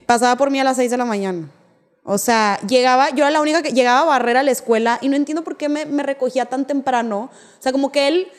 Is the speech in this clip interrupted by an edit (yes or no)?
no